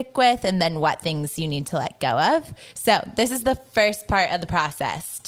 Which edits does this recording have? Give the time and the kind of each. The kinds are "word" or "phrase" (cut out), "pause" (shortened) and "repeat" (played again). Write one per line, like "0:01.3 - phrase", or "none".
none